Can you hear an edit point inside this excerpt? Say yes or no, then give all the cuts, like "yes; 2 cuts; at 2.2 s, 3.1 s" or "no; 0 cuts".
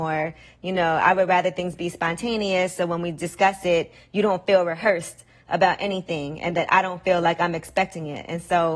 no; 0 cuts